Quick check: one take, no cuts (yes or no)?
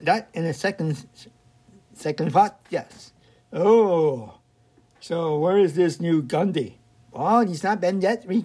yes